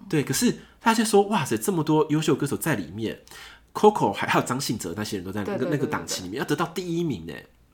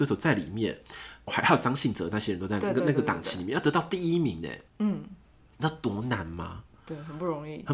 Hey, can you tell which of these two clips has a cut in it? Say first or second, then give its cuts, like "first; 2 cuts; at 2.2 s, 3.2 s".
second; 2 cuts; at 1.3 s, 4.7 s